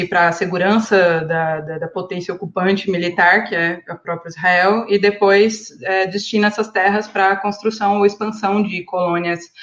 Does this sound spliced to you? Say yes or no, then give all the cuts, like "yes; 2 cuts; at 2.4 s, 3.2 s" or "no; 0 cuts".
no; 0 cuts